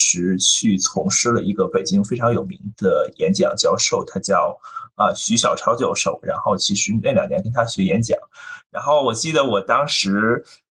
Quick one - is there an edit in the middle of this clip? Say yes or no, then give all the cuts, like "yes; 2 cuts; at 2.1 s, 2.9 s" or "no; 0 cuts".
no; 0 cuts